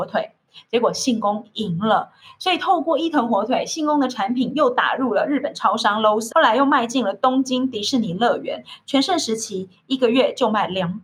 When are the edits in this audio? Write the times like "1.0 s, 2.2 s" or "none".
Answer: 6.3 s